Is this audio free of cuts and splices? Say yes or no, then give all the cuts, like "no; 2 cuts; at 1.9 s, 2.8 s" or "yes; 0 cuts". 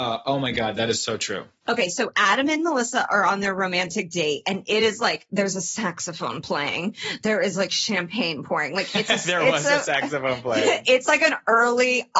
yes; 0 cuts